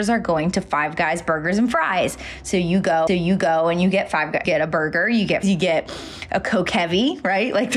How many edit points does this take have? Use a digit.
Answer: 3